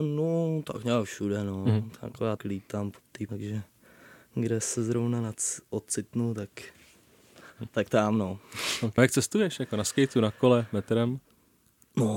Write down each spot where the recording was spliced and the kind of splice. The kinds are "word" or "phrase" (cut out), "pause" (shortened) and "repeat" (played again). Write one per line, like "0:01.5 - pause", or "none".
0:02.4 - word
0:03.3 - word
0:09.0 - word